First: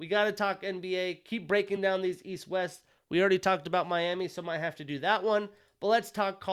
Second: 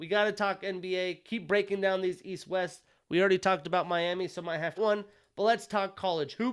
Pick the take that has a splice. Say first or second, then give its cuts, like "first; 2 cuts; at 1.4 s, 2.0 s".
second; 1 cut; at 4.8 s